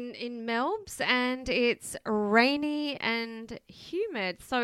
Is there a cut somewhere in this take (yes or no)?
no